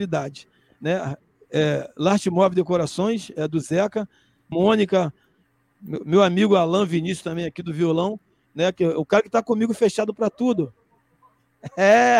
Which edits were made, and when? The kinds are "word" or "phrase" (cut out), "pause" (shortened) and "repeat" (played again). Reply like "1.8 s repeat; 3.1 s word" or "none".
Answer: 4.5 s phrase